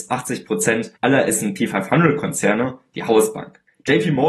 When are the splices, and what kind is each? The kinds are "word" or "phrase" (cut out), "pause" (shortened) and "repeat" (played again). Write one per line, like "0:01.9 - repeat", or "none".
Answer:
0:01.0 - pause